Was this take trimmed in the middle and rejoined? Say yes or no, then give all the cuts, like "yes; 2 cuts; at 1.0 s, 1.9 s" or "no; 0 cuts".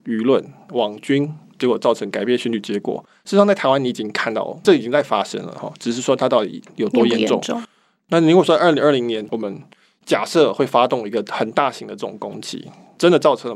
no; 0 cuts